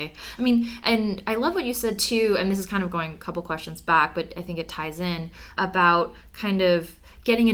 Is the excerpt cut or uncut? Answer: cut